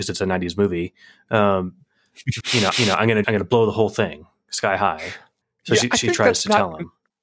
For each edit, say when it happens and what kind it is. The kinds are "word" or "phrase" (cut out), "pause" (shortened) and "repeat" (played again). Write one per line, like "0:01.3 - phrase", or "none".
0:02.4 - word
0:02.7 - repeat
0:03.2 - word